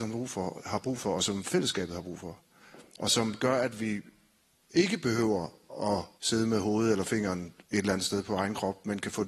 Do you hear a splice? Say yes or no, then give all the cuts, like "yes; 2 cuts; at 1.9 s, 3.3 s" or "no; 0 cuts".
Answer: yes; 2 cuts; at 6.2 s, 7.6 s